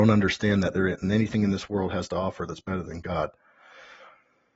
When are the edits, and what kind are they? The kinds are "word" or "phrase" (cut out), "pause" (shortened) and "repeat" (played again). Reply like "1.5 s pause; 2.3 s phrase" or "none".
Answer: none